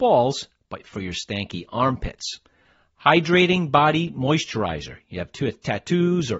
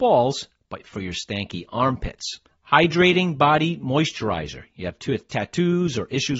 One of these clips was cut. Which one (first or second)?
second